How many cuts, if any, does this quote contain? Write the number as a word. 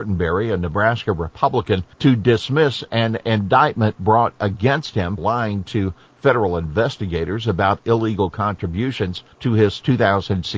three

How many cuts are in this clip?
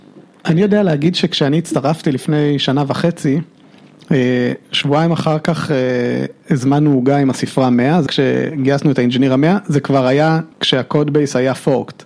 two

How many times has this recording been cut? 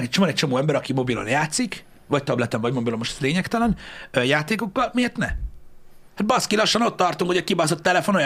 one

